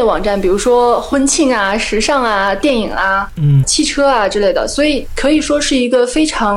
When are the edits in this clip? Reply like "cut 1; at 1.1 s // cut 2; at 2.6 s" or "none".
cut 1; at 3.6 s